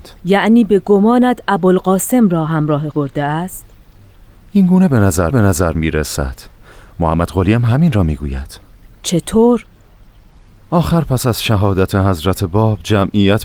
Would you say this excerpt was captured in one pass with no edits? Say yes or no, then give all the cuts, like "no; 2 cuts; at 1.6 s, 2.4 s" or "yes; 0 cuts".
no; 2 cuts; at 2.9 s, 5.3 s